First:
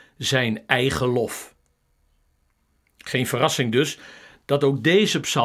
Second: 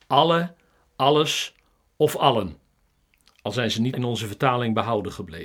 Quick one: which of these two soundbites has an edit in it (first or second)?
second